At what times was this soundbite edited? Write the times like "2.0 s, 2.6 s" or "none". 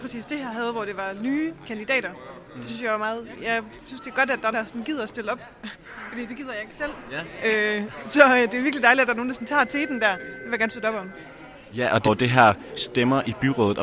4.5 s, 12.0 s, 12.8 s